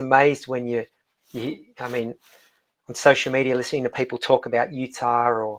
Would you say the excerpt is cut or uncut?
uncut